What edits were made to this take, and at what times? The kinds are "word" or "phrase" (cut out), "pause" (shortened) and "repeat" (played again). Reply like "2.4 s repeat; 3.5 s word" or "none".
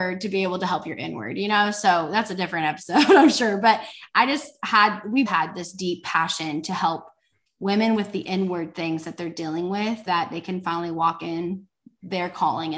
5.3 s word; 10.1 s word